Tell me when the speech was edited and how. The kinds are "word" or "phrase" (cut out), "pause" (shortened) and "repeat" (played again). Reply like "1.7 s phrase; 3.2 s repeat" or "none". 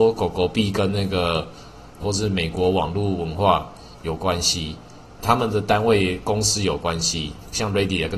2.0 s word; 5.2 s phrase